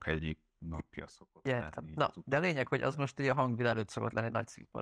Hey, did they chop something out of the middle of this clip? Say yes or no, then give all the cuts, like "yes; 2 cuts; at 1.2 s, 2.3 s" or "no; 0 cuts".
no; 0 cuts